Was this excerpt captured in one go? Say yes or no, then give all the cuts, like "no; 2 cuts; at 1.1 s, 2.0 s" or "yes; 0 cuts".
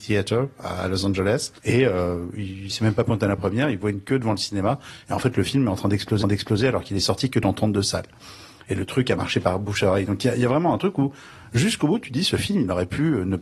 no; 2 cuts; at 1.6 s, 6.2 s